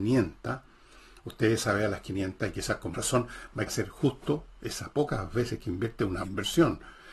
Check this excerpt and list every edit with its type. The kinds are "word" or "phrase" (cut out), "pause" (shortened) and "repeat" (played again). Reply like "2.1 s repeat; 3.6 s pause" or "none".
2.9 s word; 3.7 s word; 6.2 s word